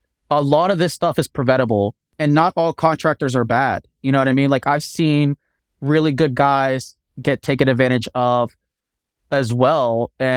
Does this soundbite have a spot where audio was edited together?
no; 0 cuts

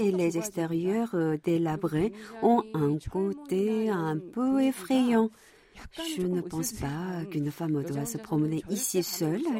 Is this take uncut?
yes; 0 cuts

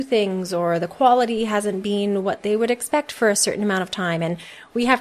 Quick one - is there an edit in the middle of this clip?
no; 0 cuts

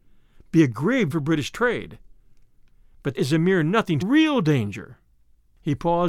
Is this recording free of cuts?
no; 3 cuts; at 1.1 s, 3.1 s, 4.0 s

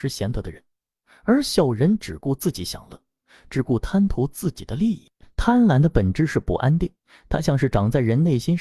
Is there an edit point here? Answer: no; 0 cuts

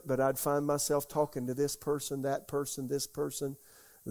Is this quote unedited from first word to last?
yes; 0 cuts

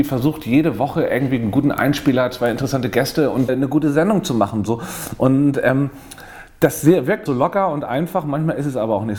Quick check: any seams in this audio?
yes; 2 cuts; at 3.5 s, 7.3 s

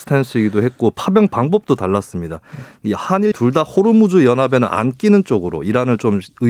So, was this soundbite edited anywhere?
yes; 1 cut; at 3.3 s

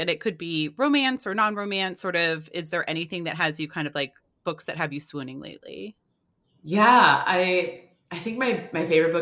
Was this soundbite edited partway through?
no; 0 cuts

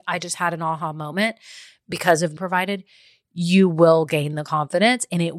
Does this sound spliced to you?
yes; 1 cut; at 2.4 s

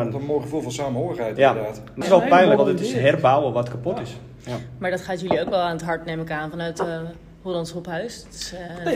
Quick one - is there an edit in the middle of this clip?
yes; 2 cuts; at 2.0 s, 2.6 s

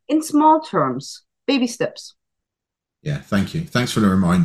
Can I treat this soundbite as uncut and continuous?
yes; 0 cuts

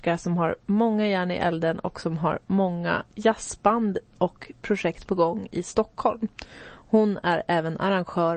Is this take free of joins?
yes; 0 cuts

